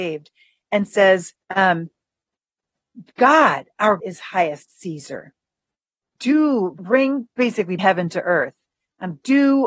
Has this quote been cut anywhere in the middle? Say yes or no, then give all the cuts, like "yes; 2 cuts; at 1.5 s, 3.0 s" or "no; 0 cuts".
yes; 5 cuts; at 1.4 s, 4.0 s, 4.7 s, 6.8 s, 7.8 s